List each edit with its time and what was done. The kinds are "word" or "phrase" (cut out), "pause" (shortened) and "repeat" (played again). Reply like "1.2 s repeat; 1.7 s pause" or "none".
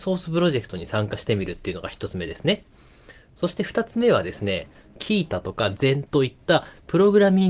none